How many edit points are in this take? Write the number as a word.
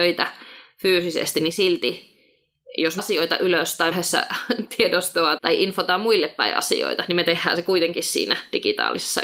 three